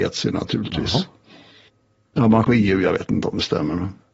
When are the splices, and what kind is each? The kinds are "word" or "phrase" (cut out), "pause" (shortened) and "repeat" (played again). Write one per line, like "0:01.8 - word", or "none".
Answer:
0:01.7 - pause
0:02.4 - word